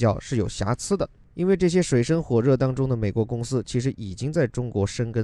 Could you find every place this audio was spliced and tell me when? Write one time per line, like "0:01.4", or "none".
none

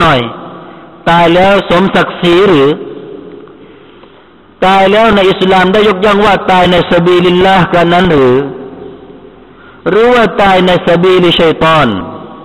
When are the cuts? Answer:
none

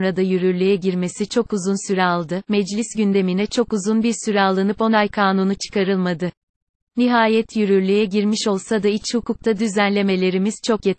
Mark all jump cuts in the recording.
none

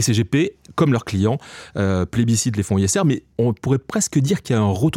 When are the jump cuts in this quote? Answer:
0:03.3

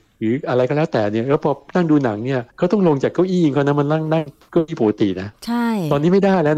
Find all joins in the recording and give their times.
0:02.5

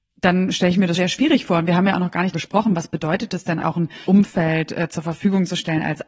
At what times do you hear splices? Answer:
0:00.9
0:02.3
0:03.6
0:04.0

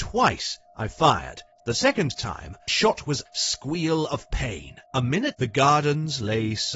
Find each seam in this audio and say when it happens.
0:01.5
0:02.7
0:03.3
0:04.8
0:05.3

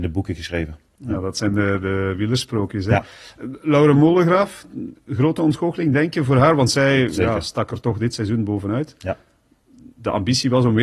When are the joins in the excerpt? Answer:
none

